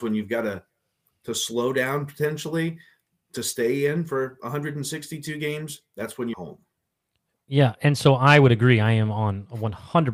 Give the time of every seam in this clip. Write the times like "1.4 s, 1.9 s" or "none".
6.3 s

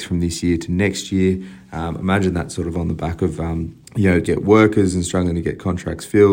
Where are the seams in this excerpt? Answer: 3.9 s, 4.2 s

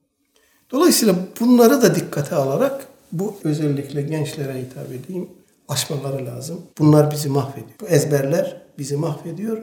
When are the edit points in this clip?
3.4 s, 5.4 s, 6.7 s, 7.7 s

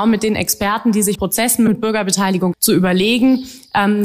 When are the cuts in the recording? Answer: 1.2 s, 1.7 s, 2.5 s

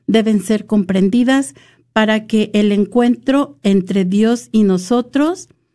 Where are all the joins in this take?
none

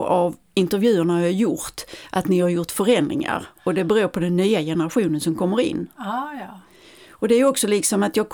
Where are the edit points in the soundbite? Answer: none

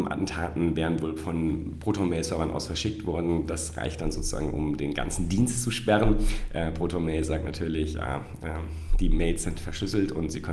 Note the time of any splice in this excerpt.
none

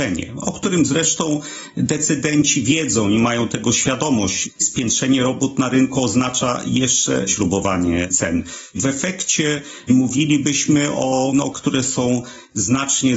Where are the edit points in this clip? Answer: 7.3 s, 11.5 s

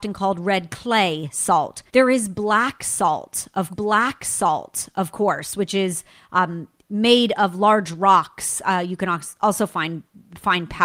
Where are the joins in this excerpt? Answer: 1.9 s, 3.7 s

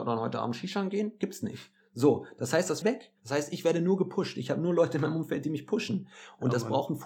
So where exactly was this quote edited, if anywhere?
2.8 s, 3.2 s

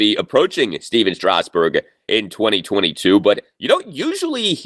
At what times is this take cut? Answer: none

